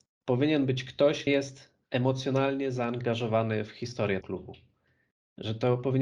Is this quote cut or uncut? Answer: cut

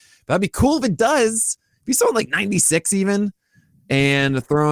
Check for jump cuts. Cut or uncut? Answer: uncut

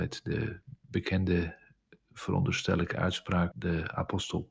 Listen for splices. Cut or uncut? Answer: cut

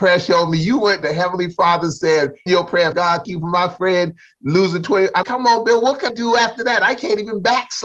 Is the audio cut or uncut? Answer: cut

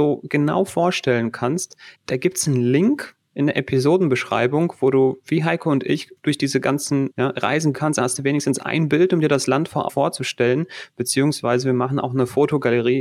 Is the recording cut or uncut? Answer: cut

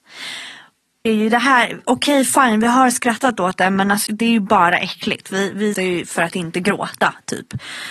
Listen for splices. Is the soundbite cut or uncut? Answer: cut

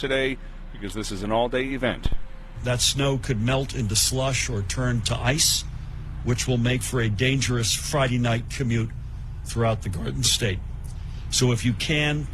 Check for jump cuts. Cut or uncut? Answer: uncut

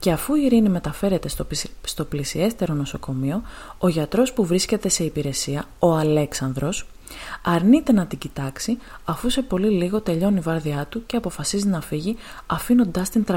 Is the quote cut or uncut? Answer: uncut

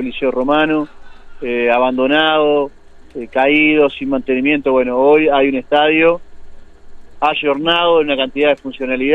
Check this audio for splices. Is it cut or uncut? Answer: uncut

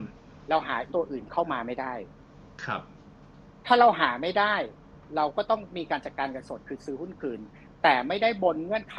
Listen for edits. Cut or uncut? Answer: cut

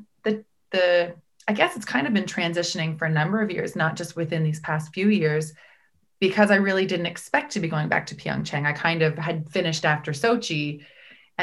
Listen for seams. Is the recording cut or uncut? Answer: uncut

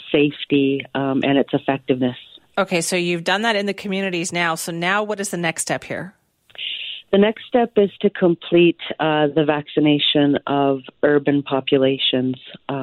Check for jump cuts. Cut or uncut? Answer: uncut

